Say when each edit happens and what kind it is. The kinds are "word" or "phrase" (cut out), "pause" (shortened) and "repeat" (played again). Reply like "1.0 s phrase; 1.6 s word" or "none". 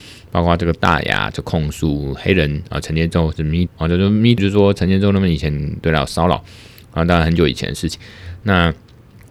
3.7 s word; 4.4 s word